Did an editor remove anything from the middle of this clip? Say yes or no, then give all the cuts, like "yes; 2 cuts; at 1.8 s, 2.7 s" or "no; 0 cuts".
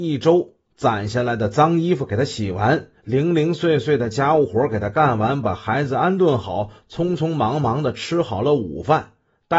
yes; 1 cut; at 3.0 s